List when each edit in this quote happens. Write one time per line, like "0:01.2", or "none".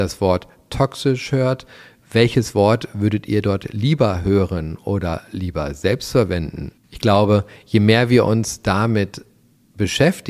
none